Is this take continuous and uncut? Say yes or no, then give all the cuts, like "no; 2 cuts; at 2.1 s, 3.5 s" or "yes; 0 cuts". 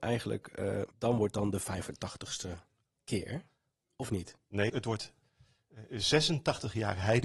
no; 2 cuts; at 0.9 s, 4.7 s